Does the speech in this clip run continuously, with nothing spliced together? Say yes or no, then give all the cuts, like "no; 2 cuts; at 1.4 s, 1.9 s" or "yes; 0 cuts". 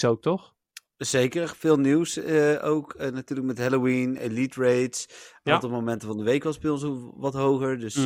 yes; 0 cuts